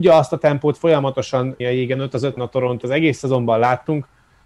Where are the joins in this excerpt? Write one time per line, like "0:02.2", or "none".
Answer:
0:01.6
0:02.4
0:02.8